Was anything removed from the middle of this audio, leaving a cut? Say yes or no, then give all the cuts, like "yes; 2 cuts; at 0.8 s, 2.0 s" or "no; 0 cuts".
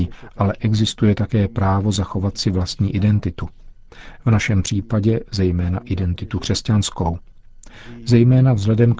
no; 0 cuts